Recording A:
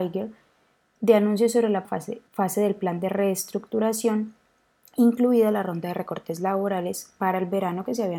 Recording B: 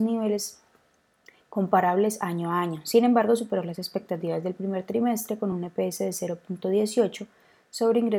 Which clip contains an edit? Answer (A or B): A